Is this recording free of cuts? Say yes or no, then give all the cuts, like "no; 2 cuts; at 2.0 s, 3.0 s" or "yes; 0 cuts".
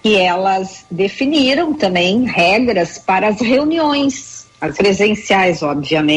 no; 1 cut; at 4.7 s